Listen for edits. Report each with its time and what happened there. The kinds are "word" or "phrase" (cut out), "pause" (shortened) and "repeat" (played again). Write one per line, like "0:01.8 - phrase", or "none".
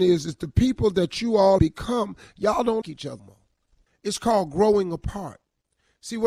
0:01.6 - word
0:02.8 - word
0:03.2 - word